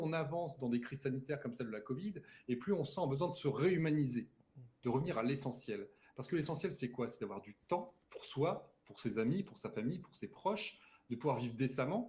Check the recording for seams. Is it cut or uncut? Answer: cut